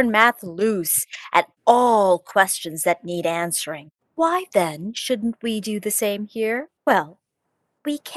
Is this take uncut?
no; 3 cuts; at 1.6 s, 4.0 s, 6.8 s

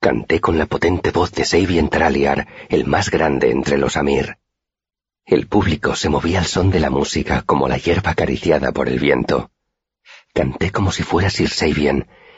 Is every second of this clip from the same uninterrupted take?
yes; 0 cuts

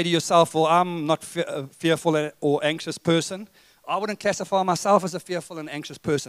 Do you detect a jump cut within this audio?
no; 0 cuts

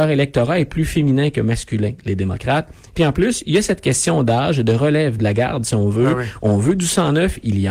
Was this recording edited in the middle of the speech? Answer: no; 0 cuts

